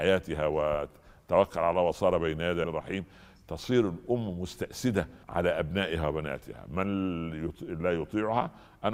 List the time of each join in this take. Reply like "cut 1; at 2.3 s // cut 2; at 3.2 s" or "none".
cut 1; at 2.6 s // cut 2; at 5.2 s